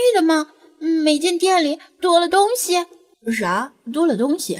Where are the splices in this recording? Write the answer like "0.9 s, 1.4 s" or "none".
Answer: 3.1 s